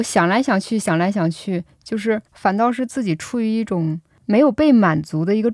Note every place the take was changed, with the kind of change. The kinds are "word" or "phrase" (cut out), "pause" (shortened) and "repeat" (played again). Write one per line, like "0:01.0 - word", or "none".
0:02.3 - pause